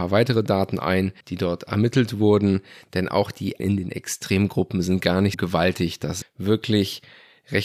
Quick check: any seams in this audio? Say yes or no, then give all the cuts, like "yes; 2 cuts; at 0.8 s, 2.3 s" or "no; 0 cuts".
yes; 4 cuts; at 1.2 s, 3.6 s, 5.3 s, 6.2 s